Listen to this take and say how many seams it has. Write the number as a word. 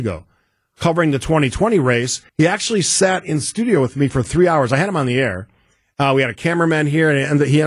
one